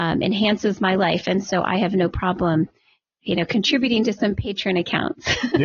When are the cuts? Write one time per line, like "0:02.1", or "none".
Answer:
none

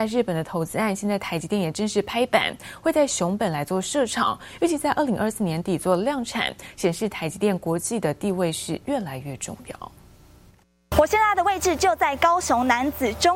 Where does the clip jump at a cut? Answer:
none

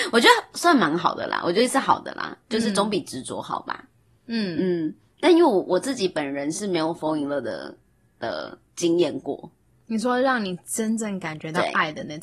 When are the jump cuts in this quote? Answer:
none

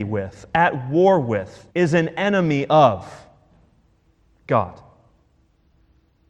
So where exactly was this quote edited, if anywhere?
0:01.7

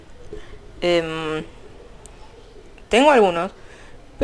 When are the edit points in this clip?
none

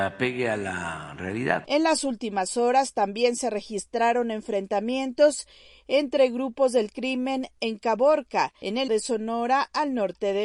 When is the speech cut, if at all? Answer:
0:08.9

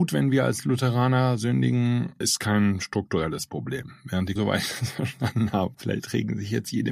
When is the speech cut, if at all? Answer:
0:02.2
0:04.4
0:05.7

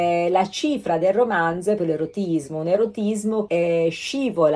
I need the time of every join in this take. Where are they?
0:01.8
0:03.5

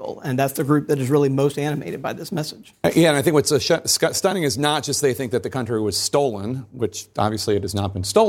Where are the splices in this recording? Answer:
none

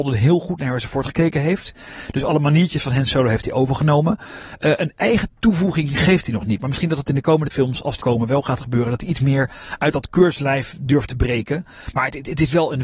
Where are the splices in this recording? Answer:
0:04.9
0:07.5
0:08.0

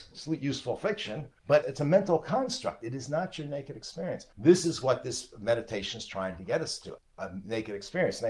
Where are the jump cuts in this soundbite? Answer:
0:01.4
0:04.3

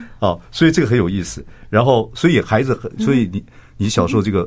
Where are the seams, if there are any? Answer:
none

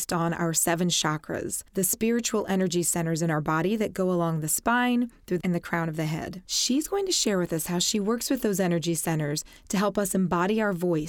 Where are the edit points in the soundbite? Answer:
0:01.7
0:05.4
0:06.4

